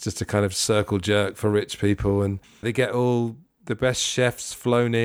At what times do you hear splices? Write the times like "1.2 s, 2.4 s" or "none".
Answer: 2.6 s